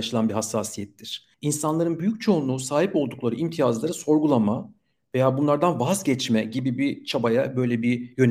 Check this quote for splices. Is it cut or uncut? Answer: uncut